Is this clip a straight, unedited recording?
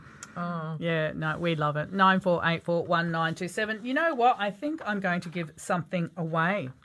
yes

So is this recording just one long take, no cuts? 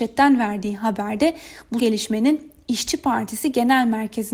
no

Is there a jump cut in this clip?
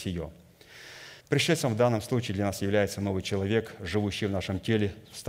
yes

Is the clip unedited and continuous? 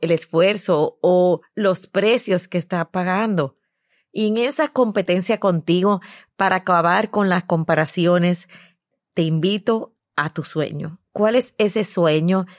yes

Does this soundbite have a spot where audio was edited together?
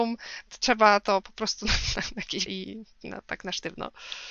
yes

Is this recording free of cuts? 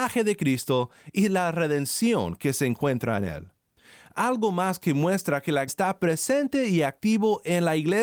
no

